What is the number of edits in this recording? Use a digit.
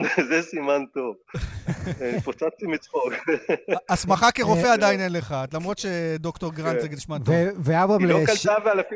0